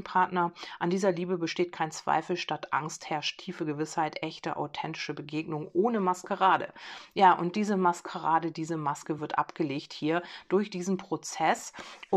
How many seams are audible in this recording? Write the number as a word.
zero